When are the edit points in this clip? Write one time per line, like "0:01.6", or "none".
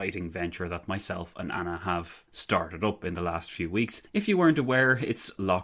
0:02.3
0:04.1